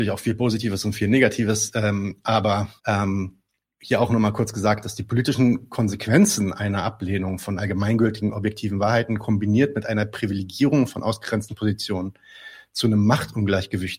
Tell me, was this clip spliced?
yes; 1 cut; at 2.8 s

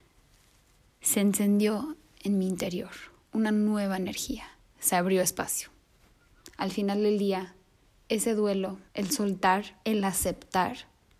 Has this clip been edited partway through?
yes; 2 cuts; at 8.9 s, 9.8 s

